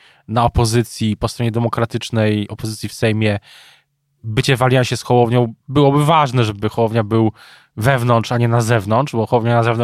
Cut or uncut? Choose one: uncut